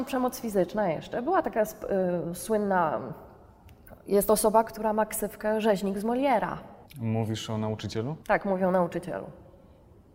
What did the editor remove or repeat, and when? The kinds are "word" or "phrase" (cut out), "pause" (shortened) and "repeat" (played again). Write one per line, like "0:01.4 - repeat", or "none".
0:06.9 - pause
0:08.2 - pause